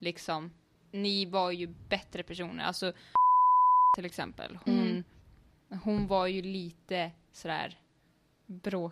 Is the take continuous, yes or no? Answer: yes